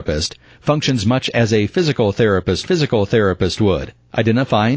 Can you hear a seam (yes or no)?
yes